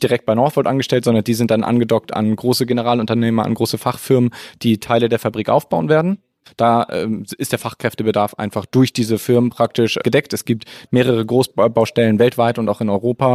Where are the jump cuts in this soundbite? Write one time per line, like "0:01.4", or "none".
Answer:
none